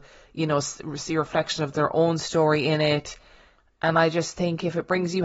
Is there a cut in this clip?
no; 0 cuts

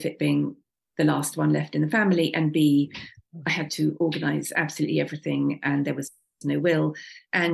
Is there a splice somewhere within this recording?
no; 0 cuts

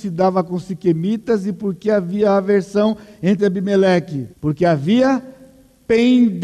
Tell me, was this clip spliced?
yes; 2 cuts; at 3.4 s, 4.3 s

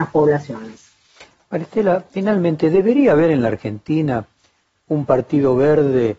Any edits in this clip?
no; 0 cuts

